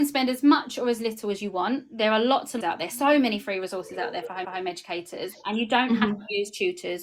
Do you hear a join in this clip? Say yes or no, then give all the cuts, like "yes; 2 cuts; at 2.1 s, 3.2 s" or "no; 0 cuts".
yes; 2 cuts; at 2.6 s, 4.4 s